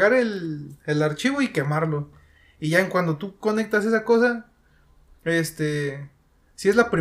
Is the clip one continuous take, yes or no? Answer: yes